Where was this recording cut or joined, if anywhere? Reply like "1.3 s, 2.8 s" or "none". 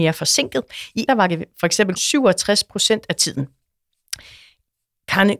1.1 s, 2.0 s, 3.2 s